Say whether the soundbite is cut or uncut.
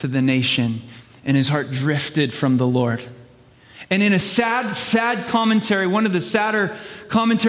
uncut